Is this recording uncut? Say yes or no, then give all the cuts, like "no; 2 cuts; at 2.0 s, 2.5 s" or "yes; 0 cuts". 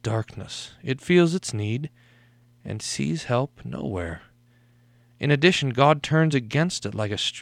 yes; 0 cuts